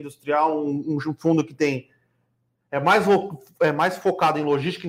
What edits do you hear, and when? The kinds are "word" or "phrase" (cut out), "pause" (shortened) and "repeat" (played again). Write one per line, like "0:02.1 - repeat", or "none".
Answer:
none